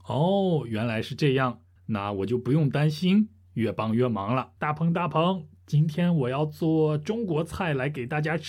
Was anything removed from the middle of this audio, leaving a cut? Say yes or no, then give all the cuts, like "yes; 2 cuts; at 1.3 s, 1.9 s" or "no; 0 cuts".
yes; 2 cuts; at 1.8 s, 4.6 s